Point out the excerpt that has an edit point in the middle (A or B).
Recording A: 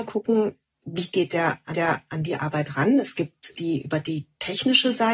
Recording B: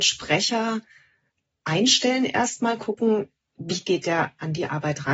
A